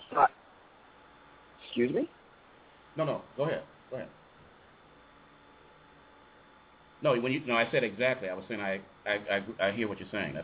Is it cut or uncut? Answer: uncut